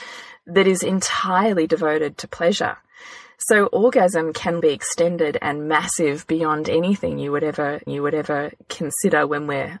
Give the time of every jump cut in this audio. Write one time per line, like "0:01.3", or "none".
0:04.6
0:07.9